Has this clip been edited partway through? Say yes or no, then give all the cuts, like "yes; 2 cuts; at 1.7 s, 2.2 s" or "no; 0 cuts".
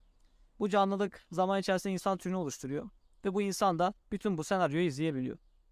no; 0 cuts